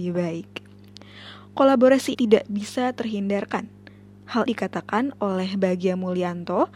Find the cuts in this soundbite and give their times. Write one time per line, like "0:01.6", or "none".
0:02.1
0:04.5